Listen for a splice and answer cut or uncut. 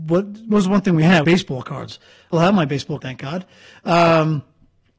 cut